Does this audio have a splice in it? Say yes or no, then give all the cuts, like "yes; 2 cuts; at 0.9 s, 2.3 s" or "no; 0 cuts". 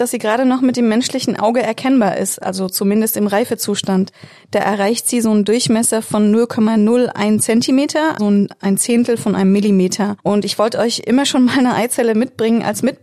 yes; 2 cuts; at 8.2 s, 10.2 s